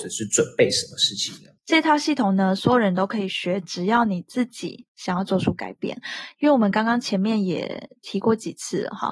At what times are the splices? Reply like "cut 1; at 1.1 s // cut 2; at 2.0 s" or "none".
cut 1; at 1.6 s